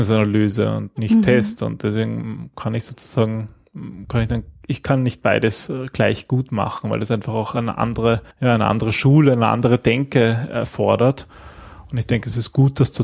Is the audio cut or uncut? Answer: cut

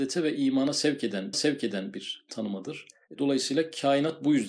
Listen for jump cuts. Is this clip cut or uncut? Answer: cut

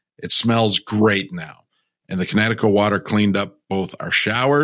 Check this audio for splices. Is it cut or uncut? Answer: uncut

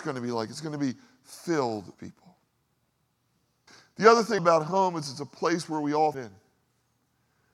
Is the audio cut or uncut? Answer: cut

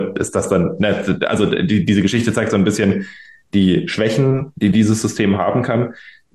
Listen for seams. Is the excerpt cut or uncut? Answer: uncut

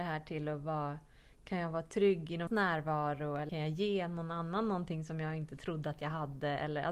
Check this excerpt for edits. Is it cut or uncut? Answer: cut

